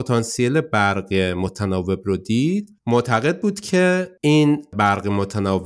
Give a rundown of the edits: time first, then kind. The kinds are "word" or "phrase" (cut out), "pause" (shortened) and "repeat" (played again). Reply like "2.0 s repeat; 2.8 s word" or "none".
2.8 s pause